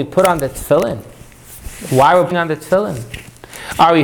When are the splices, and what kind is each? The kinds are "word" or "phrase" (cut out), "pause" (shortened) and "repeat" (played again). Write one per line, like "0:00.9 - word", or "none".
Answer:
0:02.3 - word